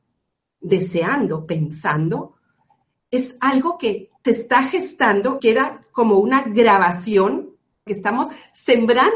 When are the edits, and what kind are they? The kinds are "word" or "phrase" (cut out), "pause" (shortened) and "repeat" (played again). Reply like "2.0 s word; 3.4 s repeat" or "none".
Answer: 1.5 s word; 4.2 s word; 5.4 s word; 7.9 s word